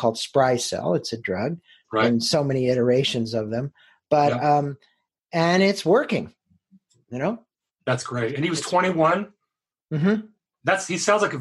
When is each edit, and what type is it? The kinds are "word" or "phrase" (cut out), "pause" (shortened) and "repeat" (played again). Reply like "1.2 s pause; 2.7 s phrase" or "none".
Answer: 1.2 s word